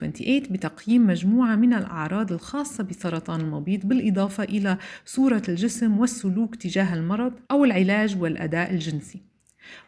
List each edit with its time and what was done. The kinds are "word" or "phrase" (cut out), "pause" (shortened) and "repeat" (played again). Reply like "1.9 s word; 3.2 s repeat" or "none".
7.4 s pause